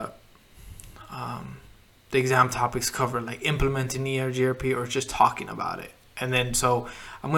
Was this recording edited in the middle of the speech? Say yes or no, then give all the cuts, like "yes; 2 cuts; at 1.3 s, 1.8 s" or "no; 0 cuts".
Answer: no; 0 cuts